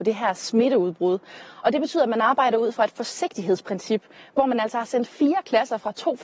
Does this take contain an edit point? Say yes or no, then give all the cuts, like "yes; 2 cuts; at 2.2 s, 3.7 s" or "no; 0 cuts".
no; 0 cuts